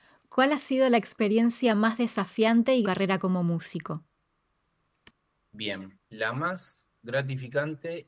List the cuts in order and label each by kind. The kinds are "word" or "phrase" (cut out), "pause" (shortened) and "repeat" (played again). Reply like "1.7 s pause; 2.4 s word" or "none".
2.8 s phrase; 6.0 s pause